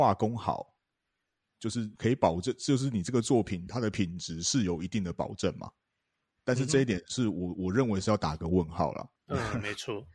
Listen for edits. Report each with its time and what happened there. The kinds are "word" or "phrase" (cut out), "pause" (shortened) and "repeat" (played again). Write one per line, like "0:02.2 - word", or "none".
0:02.0 - pause
0:09.2 - pause